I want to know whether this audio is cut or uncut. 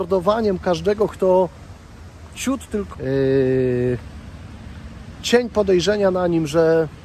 cut